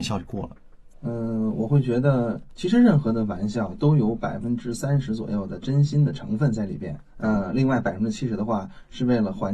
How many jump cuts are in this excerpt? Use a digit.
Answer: 2